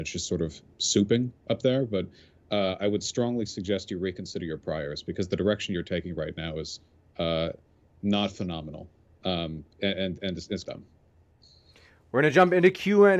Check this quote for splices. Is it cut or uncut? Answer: cut